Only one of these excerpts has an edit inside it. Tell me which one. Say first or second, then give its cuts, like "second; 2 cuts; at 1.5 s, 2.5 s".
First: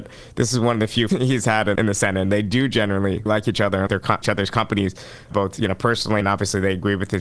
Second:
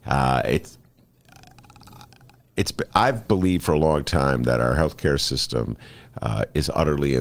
first; 7 cuts; at 1.1 s, 1.7 s, 3.3 s, 3.9 s, 4.2 s, 5.3 s, 6.2 s